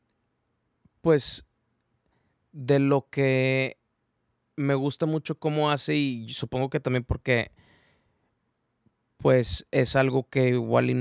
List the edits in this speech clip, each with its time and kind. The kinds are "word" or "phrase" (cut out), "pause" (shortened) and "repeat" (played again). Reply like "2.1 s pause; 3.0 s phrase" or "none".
none